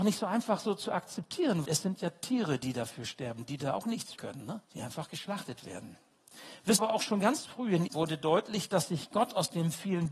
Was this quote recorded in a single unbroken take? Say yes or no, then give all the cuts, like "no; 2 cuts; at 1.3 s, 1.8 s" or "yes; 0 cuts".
no; 5 cuts; at 1.6 s, 4.1 s, 4.6 s, 6.8 s, 7.9 s